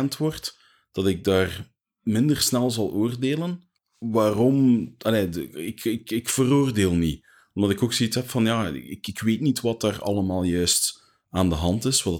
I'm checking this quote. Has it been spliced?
no; 0 cuts

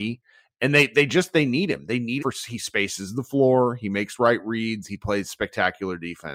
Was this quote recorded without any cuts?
no; 1 cut; at 2.2 s

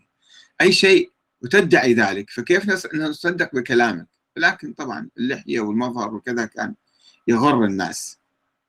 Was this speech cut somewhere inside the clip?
no; 0 cuts

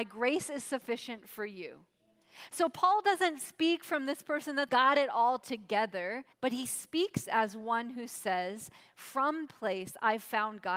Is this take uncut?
no; 3 cuts; at 4.7 s, 6.3 s, 9.5 s

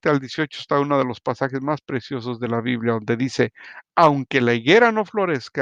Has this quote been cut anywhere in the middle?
no; 0 cuts

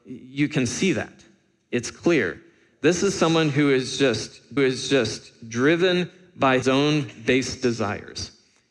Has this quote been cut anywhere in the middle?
yes; 2 cuts; at 4.6 s, 6.6 s

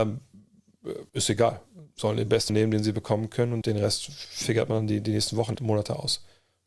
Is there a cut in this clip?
yes; 4 cuts; at 1.1 s, 2.5 s, 3.6 s, 5.5 s

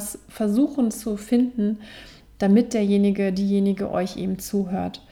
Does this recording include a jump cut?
no; 0 cuts

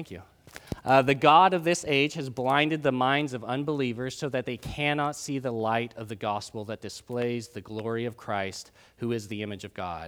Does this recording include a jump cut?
no; 0 cuts

